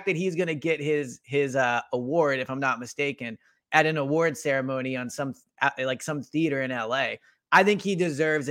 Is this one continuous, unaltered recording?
yes; 0 cuts

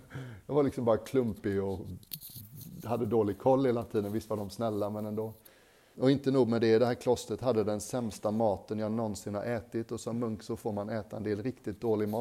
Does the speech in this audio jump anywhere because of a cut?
no; 0 cuts

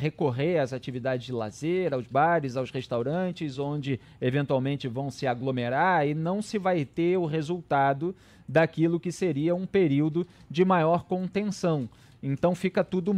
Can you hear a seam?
no; 0 cuts

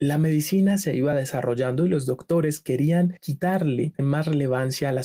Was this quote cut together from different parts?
no; 0 cuts

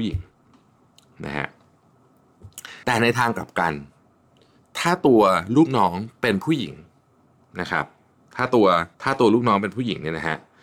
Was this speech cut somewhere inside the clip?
yes; 2 cuts; at 2.8 s, 8.9 s

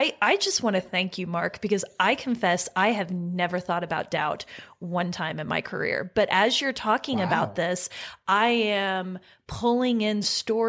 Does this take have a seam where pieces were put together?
no; 0 cuts

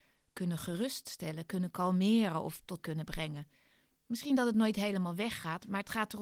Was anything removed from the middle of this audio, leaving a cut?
yes; 1 cut; at 2.8 s

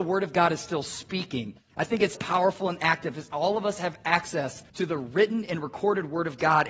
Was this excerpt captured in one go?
no; 2 cuts; at 2.2 s, 4.7 s

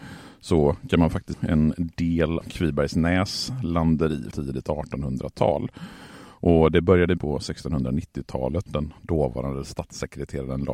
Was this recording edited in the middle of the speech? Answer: yes; 5 cuts; at 1.3 s, 2.4 s, 4.3 s, 7.2 s, 8.7 s

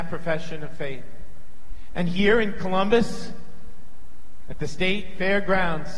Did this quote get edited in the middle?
no; 0 cuts

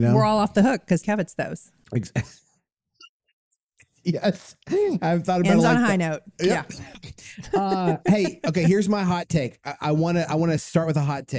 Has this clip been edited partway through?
yes; 1 cut; at 1.0 s

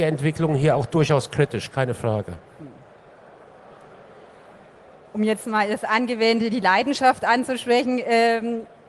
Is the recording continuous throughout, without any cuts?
yes; 0 cuts

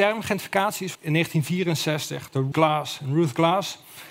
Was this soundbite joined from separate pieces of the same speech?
yes; 2 cuts; at 0.9 s, 2.5 s

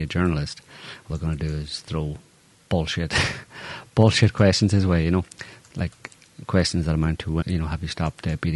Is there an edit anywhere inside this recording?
yes; 2 cuts; at 1.1 s, 7.4 s

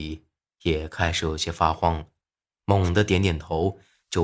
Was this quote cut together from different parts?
no; 0 cuts

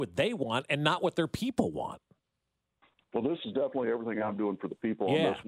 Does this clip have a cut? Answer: no; 0 cuts

